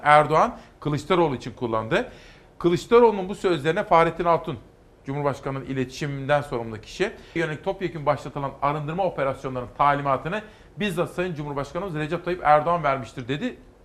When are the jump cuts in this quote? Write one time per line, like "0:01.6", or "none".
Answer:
0:07.4